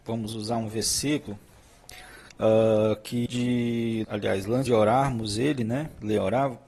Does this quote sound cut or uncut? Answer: cut